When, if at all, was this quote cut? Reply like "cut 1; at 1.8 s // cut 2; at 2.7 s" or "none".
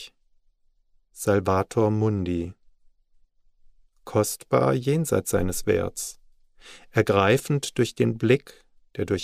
none